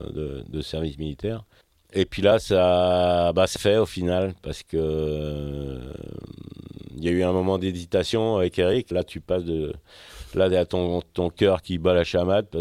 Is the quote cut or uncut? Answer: cut